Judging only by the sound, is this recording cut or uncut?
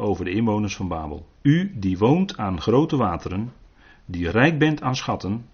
cut